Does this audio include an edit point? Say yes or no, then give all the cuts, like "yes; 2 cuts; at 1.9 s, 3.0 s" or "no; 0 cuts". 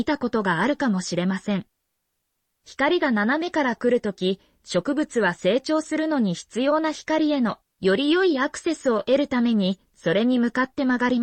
no; 0 cuts